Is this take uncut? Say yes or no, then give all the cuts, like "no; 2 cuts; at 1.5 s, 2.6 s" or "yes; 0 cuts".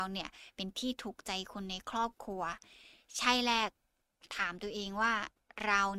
yes; 0 cuts